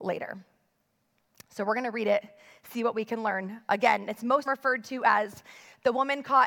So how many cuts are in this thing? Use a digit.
1